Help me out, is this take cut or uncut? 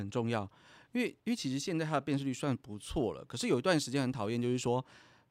cut